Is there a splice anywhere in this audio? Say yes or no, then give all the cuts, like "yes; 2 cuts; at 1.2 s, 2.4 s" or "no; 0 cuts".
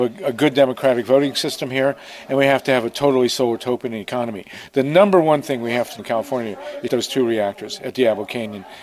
yes; 2 cuts; at 6.0 s, 6.9 s